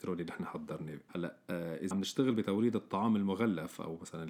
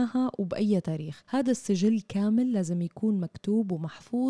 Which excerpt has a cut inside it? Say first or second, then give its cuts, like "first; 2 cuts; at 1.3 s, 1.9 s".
first; 1 cut; at 1.9 s